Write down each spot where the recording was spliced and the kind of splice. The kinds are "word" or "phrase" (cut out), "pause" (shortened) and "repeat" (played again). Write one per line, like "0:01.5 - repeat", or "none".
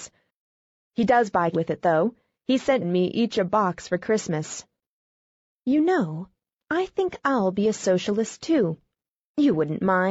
0:01.5 - word
0:02.8 - word